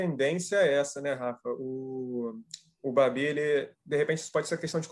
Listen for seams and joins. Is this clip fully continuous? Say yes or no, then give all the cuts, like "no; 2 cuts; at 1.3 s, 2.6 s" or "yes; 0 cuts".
yes; 0 cuts